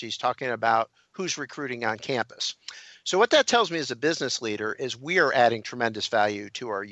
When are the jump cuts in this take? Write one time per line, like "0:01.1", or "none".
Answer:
none